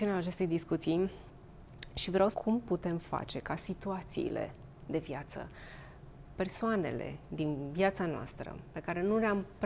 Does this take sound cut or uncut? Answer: cut